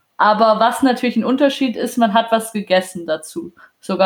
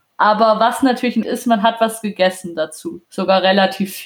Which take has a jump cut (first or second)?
second